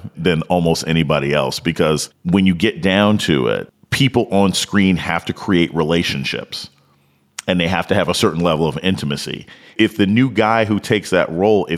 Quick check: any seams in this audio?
no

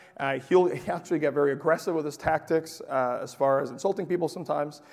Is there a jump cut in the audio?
no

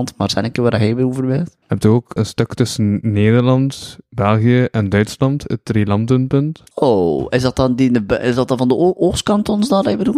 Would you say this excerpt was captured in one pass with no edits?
no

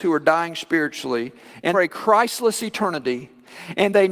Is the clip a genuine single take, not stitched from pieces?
no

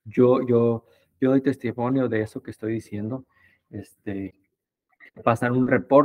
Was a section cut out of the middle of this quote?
no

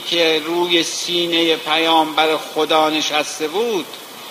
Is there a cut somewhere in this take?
no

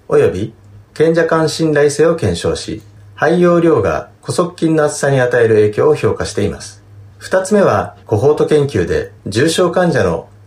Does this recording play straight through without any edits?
no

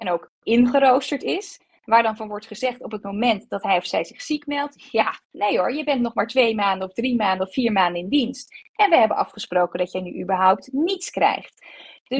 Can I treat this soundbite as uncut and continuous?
no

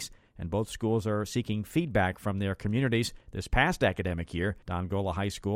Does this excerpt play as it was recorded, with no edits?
no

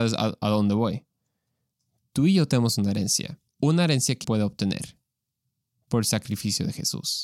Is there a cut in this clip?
yes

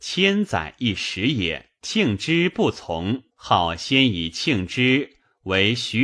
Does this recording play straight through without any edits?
no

